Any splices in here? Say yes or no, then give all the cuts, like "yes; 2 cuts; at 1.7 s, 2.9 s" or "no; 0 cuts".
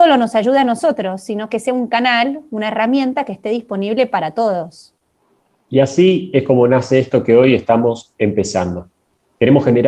no; 0 cuts